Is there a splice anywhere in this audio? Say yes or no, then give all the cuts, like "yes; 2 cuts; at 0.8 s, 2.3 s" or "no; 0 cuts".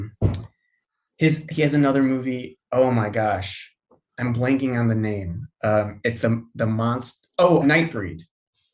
yes; 3 cuts; at 5.5 s, 6.2 s, 7.6 s